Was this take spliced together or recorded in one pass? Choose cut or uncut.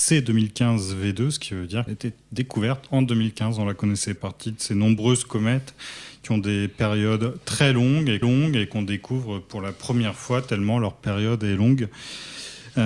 cut